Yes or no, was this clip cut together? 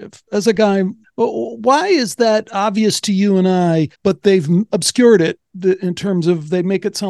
yes